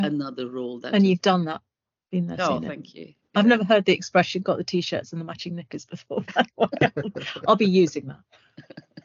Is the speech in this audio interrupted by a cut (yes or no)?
no